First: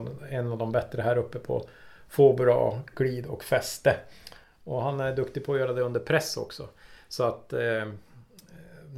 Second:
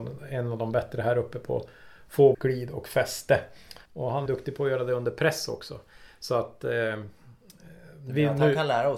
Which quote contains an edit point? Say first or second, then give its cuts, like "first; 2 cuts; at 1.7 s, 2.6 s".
second; 3 cuts; at 2.3 s, 3.9 s, 4.3 s